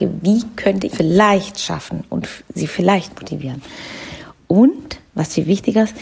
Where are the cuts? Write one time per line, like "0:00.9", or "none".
0:00.9